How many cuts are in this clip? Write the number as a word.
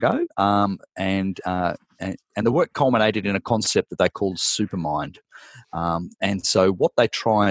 zero